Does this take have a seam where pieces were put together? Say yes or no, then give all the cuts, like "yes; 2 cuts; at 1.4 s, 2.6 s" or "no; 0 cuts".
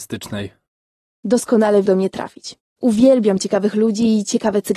yes; 2 cuts; at 1.9 s, 2.7 s